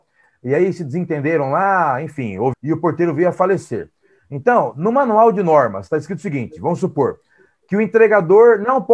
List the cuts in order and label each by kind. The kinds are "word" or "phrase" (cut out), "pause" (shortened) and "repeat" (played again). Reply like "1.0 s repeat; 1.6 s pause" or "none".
2.5 s word